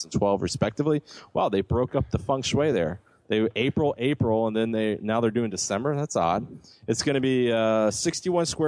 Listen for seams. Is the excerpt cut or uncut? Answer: uncut